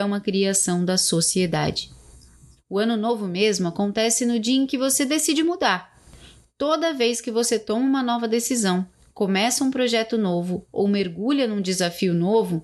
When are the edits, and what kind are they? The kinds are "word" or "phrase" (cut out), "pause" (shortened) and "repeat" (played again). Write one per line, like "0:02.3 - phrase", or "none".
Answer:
none